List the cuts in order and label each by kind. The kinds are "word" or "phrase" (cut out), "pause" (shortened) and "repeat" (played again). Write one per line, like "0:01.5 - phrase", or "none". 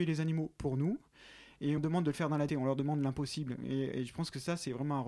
0:01.8 - word
0:02.5 - word